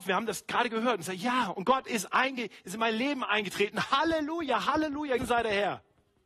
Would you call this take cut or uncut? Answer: cut